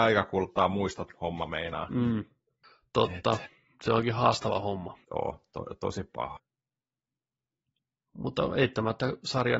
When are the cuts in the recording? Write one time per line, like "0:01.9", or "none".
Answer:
0:05.0